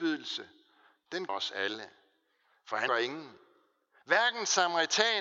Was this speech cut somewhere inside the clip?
yes; 2 cuts; at 1.3 s, 2.9 s

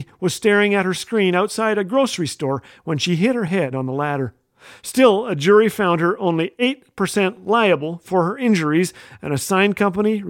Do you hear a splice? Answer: no; 0 cuts

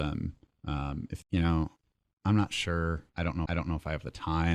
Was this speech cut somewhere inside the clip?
yes; 3 cuts; at 1.2 s, 3.1 s, 3.5 s

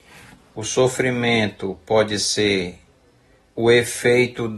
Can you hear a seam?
yes; 1 cut; at 3.4 s

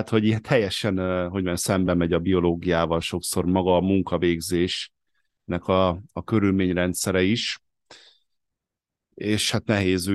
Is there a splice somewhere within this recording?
no; 0 cuts

